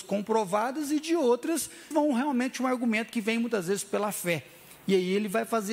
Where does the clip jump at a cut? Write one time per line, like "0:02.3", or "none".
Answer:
0:01.9

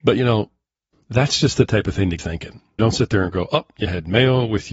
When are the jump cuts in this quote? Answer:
0:00.9
0:02.2
0:02.8

